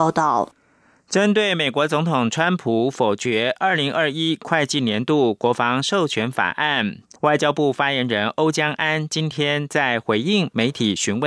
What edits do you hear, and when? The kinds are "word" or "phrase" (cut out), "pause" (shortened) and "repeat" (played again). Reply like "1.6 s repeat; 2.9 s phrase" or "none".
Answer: 7.2 s pause